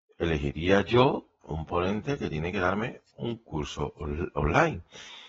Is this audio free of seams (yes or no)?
no